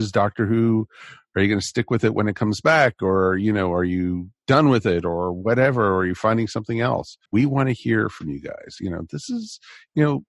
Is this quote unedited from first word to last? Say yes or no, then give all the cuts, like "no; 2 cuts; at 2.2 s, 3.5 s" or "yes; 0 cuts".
no; 1 cut; at 7.3 s